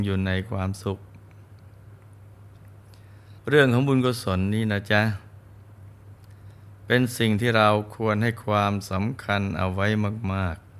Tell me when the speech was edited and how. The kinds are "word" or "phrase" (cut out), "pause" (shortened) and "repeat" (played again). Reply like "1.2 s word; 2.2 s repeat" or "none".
3.4 s pause